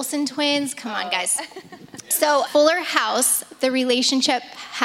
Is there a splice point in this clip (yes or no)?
yes